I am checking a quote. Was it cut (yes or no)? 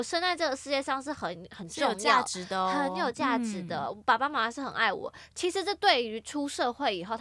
no